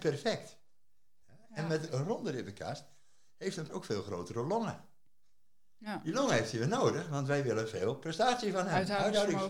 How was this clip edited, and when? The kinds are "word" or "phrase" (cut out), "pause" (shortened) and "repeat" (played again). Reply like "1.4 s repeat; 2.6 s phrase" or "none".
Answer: 3.7 s word

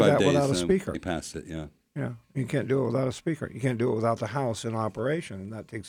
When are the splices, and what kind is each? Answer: 0.9 s word

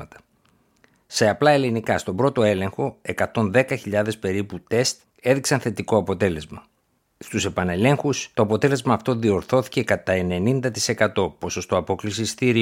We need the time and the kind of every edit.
8.3 s pause

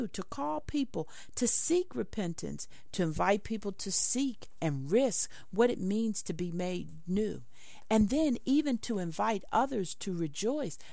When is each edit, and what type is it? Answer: none

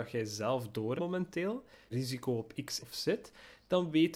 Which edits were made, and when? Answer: 1.0 s word; 1.9 s phrase; 2.8 s word

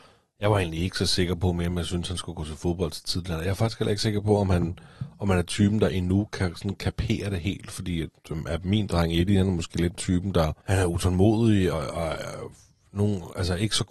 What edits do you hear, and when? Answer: 9.9 s word; 10.6 s pause; 11.7 s word

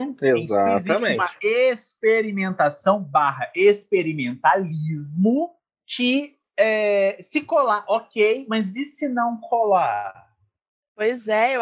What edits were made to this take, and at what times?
none

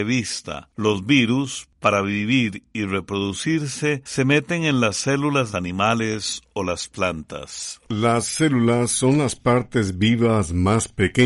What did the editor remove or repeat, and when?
5.5 s phrase

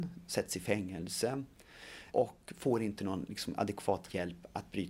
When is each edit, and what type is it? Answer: 2.1 s word

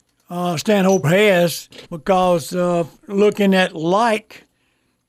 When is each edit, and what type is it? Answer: 1.0 s word; 1.8 s pause; 3.0 s pause

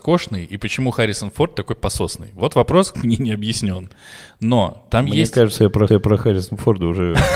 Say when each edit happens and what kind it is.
2.9 s phrase; 5.9 s repeat

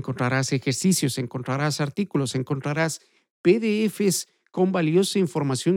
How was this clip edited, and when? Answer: none

